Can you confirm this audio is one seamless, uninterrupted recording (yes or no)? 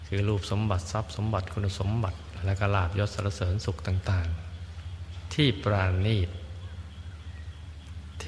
yes